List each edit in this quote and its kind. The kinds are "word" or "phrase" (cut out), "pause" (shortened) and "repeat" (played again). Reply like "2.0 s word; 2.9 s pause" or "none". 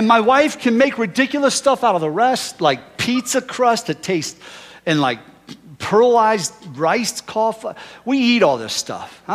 none